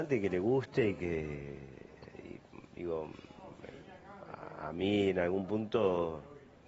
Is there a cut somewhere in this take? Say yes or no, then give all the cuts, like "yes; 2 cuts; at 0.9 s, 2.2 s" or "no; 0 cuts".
no; 0 cuts